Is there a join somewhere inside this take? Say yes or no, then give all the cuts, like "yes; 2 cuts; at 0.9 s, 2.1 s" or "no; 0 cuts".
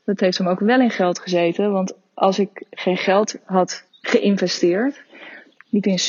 yes; 1 cut; at 3.9 s